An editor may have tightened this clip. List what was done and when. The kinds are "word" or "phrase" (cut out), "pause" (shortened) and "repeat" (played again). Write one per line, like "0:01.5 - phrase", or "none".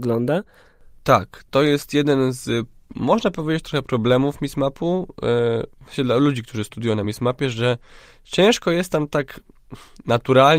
none